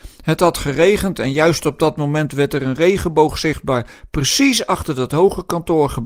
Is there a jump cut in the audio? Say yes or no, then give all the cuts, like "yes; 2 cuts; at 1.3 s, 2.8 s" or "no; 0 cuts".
no; 0 cuts